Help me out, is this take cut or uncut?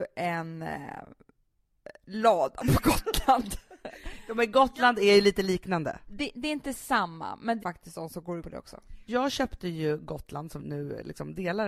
cut